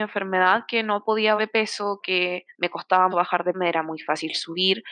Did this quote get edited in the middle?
yes; 3 cuts; at 1.4 s, 3.1 s, 3.5 s

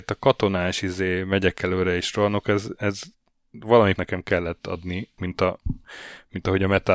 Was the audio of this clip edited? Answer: yes; 2 cuts; at 4.0 s, 5.2 s

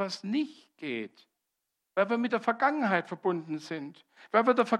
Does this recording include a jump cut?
no; 0 cuts

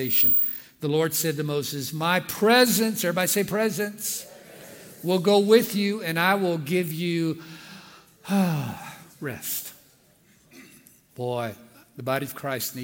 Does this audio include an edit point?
no; 0 cuts

